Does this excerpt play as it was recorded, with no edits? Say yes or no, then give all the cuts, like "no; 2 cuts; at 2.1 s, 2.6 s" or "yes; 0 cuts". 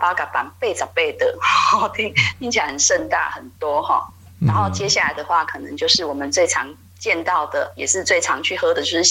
yes; 0 cuts